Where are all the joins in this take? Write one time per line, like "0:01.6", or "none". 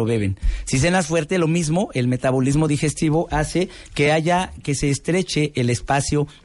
none